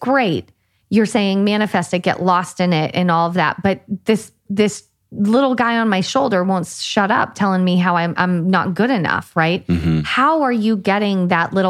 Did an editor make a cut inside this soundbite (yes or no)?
no